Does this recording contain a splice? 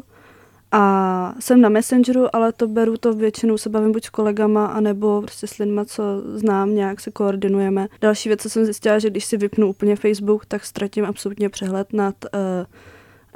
yes; 1 cut; at 8.0 s

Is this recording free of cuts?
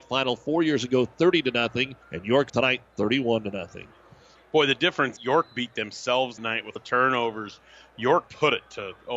no; 6 cuts; at 2.0 s, 2.5 s, 5.2 s, 6.4 s, 6.8 s, 8.3 s

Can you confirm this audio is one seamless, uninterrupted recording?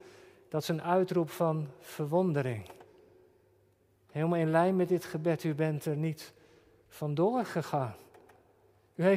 yes; 0 cuts

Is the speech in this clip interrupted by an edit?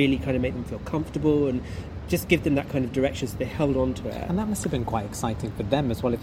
no; 0 cuts

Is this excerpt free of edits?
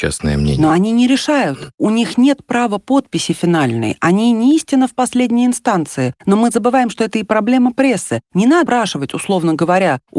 no; 1 cut; at 8.7 s

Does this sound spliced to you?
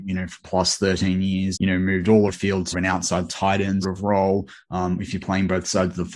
yes; 5 cuts; at 1.5 s, 2.3 s, 2.7 s, 3.3 s, 3.8 s

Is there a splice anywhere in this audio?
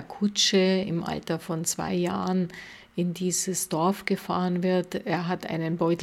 no; 0 cuts

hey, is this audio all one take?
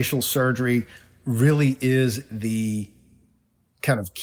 yes; 0 cuts

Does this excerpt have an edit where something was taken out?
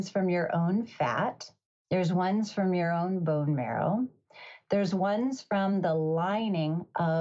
no; 0 cuts

